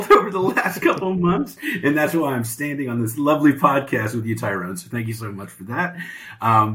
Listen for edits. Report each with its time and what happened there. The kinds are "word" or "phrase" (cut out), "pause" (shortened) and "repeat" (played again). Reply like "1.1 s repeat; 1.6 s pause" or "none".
none